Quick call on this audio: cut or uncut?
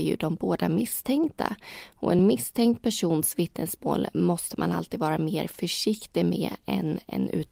uncut